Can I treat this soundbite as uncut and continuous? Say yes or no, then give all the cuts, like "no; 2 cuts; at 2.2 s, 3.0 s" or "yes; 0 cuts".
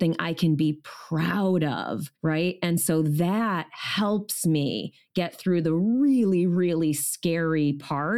no; 1 cut; at 2.2 s